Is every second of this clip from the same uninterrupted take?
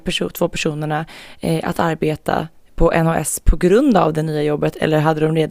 yes; 0 cuts

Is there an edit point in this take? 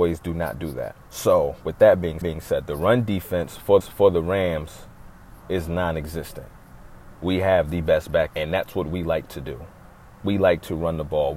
yes; 5 cuts; at 1.0 s, 2.2 s, 3.8 s, 7.1 s, 8.3 s

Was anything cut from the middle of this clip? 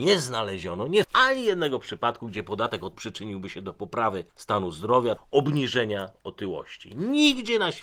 yes; 4 cuts; at 1.0 s, 2.9 s, 4.3 s, 5.2 s

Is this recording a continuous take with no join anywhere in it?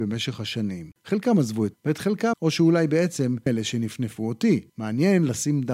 no; 5 cuts; at 1.0 s, 1.7 s, 2.3 s, 3.5 s, 4.7 s

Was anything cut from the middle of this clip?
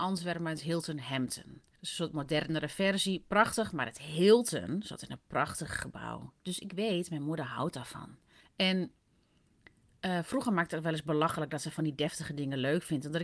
yes; 2 cuts; at 1.8 s, 8.4 s

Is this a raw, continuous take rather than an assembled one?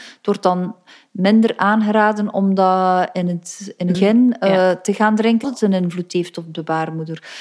no; 2 cuts; at 3.9 s, 5.4 s

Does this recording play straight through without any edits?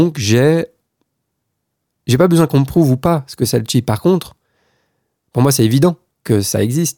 yes; 0 cuts

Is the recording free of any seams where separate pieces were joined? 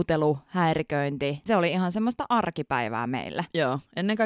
no; 1 cut; at 1.5 s

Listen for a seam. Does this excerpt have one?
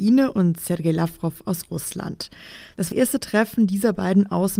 yes; 1 cut; at 2.9 s

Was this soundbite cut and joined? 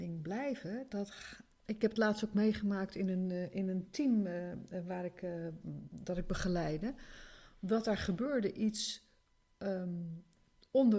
no; 0 cuts

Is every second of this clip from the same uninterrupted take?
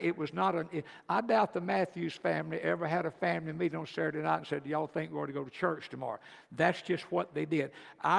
yes; 0 cuts

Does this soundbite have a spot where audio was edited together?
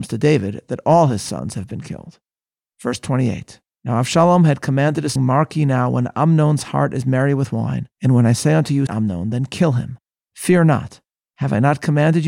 yes; 4 cuts; at 3.7 s, 5.2 s, 7.9 s, 8.9 s

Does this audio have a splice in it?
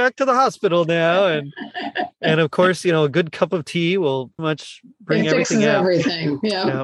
yes; 1 cut; at 4.4 s

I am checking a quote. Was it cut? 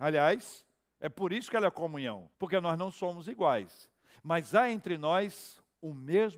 yes; 1 cut; at 2.3 s

